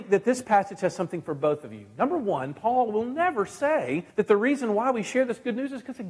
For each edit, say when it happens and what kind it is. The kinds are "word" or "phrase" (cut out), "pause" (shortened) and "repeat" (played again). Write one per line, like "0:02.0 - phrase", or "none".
0:04.1 - pause